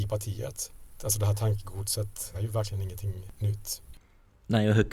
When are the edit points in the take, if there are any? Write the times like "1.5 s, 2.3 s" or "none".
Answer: 2.3 s